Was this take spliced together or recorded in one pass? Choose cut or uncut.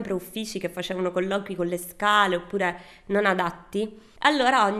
uncut